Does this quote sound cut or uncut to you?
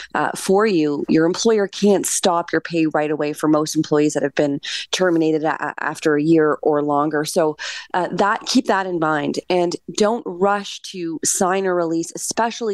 uncut